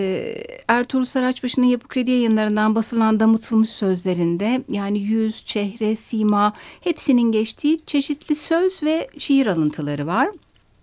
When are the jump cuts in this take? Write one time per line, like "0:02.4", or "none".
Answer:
none

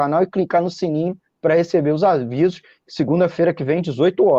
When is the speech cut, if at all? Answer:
none

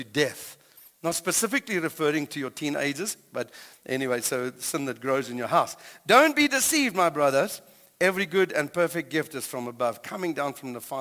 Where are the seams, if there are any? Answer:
none

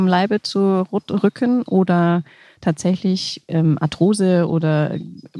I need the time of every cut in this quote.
none

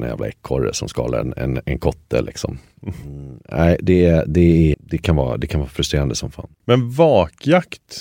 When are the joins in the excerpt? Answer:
0:01.4
0:04.7
0:06.5

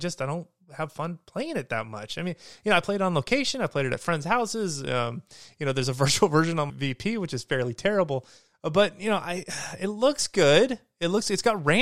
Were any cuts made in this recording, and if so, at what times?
0:06.7

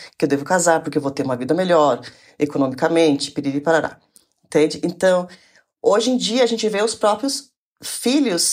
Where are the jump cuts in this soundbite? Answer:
none

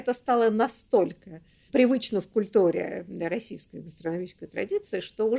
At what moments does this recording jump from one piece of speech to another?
none

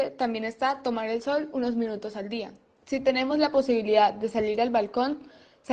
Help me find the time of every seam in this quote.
none

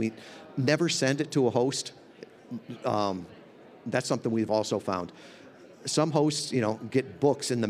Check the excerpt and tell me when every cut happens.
none

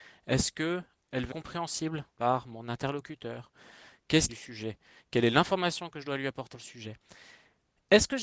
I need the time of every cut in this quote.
0:01.3
0:02.1
0:04.3
0:06.5

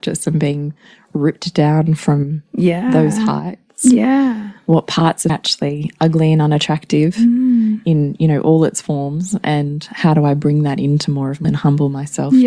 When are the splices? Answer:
0:05.3
0:11.4

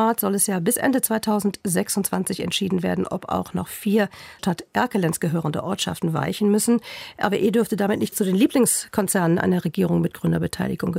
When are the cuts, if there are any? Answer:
0:04.4
0:08.1

